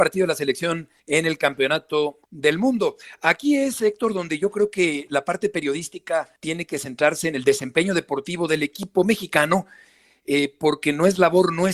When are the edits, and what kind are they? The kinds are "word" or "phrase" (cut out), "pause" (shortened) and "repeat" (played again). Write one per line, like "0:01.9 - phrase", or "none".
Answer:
0:01.0 - pause
0:02.2 - pause
0:06.4 - pause